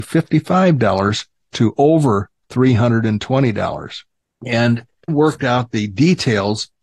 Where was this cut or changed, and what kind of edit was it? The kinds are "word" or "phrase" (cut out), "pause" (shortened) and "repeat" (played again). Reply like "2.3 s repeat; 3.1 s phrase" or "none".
1.5 s phrase; 5.1 s word